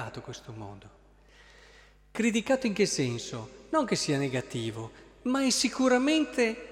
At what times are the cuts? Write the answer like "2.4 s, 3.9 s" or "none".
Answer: none

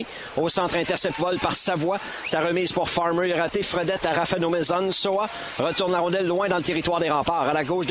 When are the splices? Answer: 1.2 s

